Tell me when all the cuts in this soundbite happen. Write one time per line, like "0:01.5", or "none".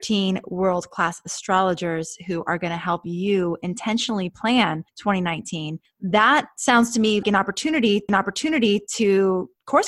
0:07.2
0:08.1